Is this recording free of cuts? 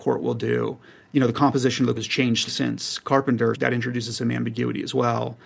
no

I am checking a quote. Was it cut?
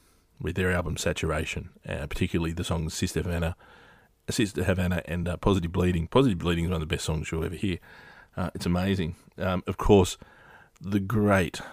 no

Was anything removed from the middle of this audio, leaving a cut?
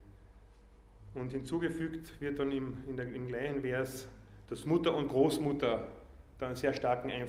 no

